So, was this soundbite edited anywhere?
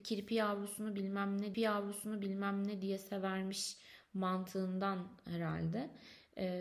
yes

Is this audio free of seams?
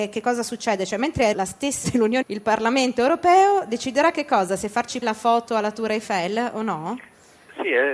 no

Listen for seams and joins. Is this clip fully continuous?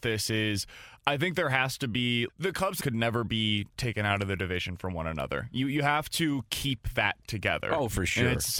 no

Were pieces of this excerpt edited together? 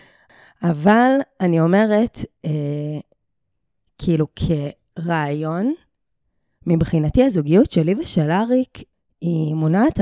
no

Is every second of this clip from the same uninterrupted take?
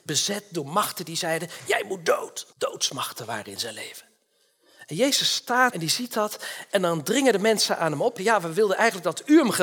no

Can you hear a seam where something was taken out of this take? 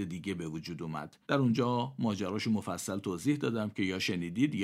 yes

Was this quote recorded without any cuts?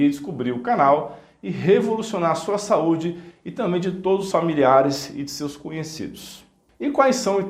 no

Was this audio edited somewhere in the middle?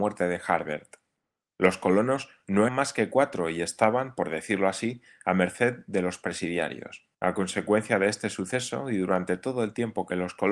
yes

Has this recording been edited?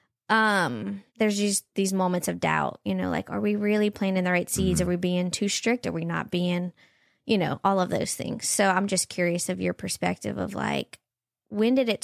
yes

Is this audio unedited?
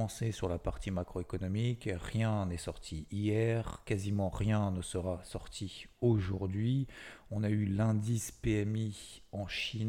yes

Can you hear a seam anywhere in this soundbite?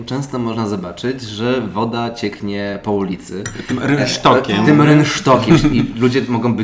no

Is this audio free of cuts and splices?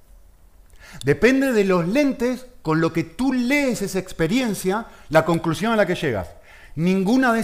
yes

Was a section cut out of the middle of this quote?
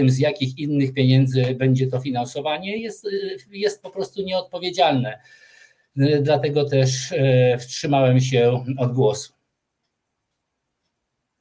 no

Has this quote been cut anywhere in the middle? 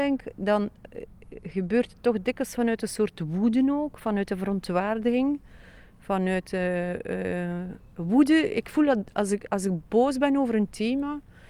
no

